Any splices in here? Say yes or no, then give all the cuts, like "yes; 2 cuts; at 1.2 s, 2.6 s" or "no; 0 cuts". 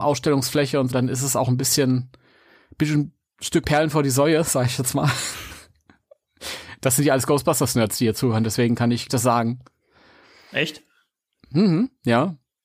yes; 3 cuts; at 0.9 s, 3.6 s, 9.1 s